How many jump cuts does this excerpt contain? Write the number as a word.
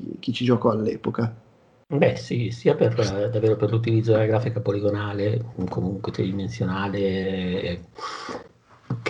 zero